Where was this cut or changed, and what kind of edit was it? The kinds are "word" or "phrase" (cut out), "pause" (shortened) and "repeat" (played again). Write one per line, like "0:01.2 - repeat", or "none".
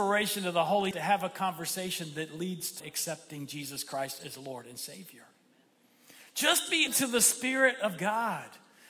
0:00.9 - word
0:02.8 - word
0:06.9 - word